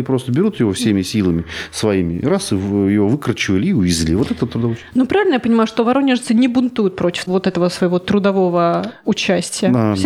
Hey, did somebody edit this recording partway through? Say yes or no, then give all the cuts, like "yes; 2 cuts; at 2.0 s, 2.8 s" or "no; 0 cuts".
no; 0 cuts